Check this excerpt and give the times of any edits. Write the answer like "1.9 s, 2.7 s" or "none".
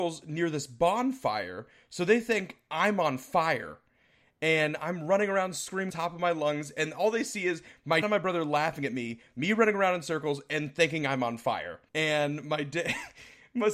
5.9 s, 8.0 s, 11.9 s